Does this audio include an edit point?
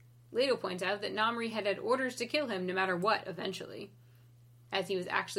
no; 0 cuts

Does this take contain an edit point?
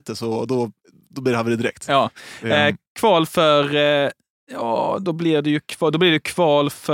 no; 0 cuts

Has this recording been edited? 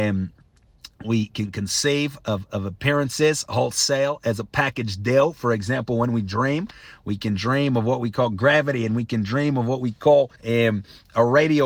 yes; 1 cut; at 10.4 s

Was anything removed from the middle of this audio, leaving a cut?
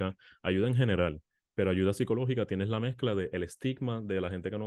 no; 0 cuts

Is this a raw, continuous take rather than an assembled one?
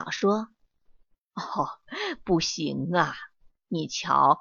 yes; 0 cuts

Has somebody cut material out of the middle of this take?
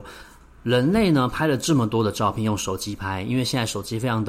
no; 0 cuts

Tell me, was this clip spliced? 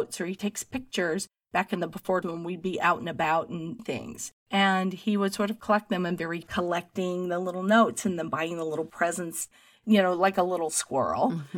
yes; 4 cuts; at 2.2 s, 3.8 s, 4.4 s, 6.4 s

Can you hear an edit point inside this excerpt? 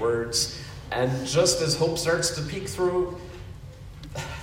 no; 0 cuts

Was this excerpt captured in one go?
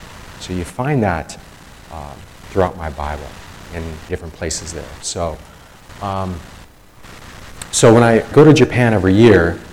no; 2 cuts; at 4.1 s, 8.3 s

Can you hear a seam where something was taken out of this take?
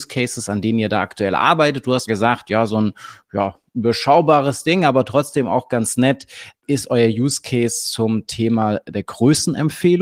yes; 1 cut; at 2.1 s

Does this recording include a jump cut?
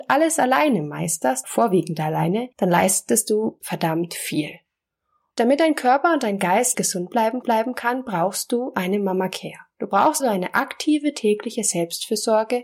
yes; 6 cuts; at 1.4 s, 2.5 s, 3.6 s, 6.7 s, 7.4 s, 10.2 s

